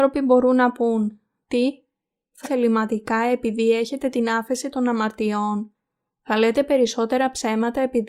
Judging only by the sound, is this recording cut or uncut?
cut